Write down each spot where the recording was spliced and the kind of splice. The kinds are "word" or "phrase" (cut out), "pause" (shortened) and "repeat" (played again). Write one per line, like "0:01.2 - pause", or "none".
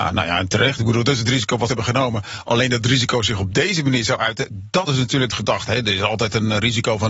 0:01.7 - phrase
0:04.9 - word
0:05.3 - word